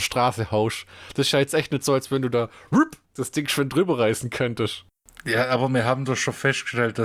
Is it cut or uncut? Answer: uncut